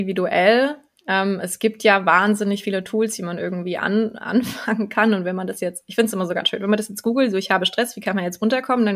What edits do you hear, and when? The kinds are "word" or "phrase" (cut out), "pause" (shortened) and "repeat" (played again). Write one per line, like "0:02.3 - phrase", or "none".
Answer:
none